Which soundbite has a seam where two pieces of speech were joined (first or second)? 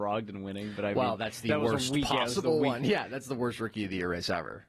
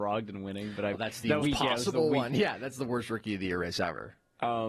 second